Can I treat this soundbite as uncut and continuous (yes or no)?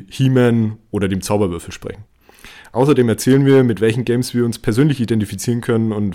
yes